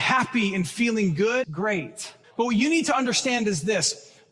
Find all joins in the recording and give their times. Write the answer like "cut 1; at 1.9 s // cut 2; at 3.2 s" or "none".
cut 1; at 1.4 s // cut 2; at 2.2 s